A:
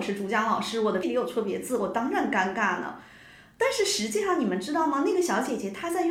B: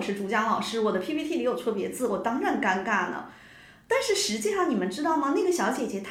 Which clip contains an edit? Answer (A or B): A